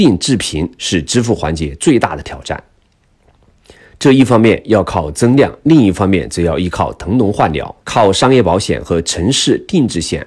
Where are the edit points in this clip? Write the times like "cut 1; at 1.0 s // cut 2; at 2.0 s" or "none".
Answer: cut 1; at 7.8 s